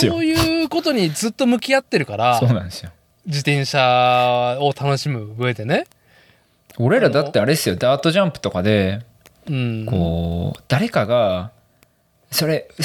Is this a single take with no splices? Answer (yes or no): yes